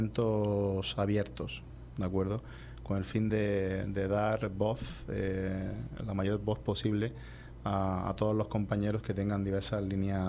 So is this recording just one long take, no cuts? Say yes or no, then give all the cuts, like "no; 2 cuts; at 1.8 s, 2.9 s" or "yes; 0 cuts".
yes; 0 cuts